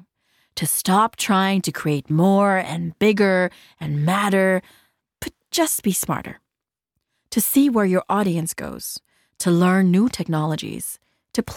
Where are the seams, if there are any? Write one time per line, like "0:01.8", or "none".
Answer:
none